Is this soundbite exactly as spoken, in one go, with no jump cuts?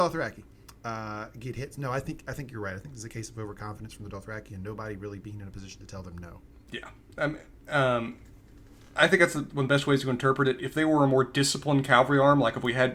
yes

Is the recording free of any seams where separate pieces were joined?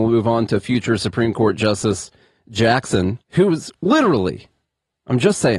yes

